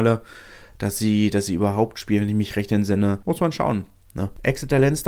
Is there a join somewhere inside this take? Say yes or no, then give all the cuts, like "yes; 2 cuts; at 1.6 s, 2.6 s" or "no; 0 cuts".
no; 0 cuts